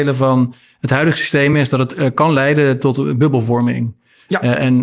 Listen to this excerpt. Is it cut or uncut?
uncut